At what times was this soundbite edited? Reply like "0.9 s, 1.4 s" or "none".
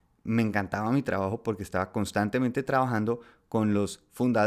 none